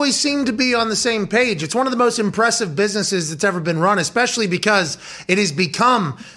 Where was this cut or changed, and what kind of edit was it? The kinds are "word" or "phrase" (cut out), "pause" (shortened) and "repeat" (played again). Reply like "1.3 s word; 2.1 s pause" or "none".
none